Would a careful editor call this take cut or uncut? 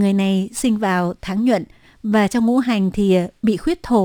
uncut